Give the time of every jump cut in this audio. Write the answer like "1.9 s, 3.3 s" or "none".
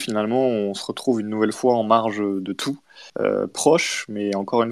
3.1 s